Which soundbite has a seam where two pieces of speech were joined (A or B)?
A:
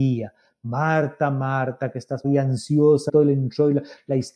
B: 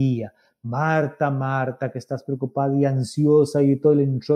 A